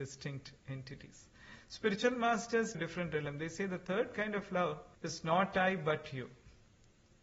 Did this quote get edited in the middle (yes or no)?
yes